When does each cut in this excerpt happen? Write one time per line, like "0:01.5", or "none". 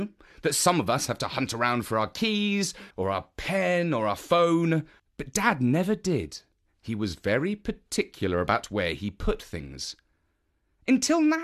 0:02.9
0:05.0